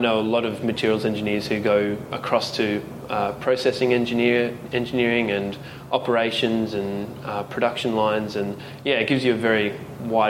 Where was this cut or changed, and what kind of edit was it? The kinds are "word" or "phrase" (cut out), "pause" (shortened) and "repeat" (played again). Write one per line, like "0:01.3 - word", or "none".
none